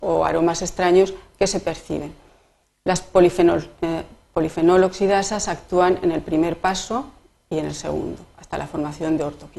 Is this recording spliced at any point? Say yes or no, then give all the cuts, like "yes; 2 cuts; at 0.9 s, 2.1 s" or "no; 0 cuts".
no; 0 cuts